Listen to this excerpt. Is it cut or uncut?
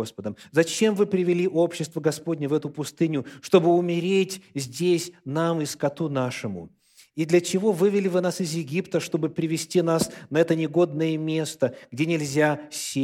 uncut